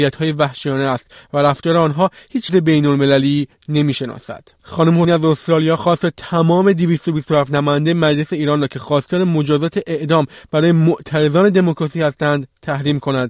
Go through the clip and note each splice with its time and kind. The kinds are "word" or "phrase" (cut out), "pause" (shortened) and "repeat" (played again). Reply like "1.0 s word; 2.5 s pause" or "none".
2.5 s word; 5.0 s word